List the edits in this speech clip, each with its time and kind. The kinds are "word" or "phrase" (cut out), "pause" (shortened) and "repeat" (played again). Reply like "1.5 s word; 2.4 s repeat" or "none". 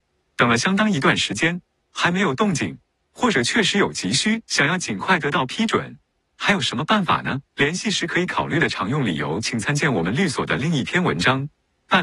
7.5 s pause